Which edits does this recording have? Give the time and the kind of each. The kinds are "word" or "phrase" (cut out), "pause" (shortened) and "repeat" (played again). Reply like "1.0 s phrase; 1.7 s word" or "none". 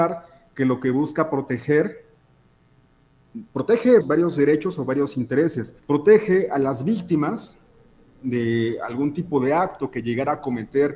4.0 s word; 5.8 s pause